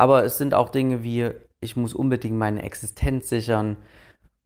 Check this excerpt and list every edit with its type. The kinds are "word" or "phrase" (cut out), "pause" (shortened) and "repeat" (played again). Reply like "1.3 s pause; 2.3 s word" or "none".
none